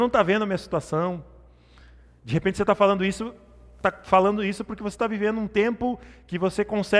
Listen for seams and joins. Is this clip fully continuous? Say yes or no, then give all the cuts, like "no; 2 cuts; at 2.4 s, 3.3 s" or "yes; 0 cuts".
yes; 0 cuts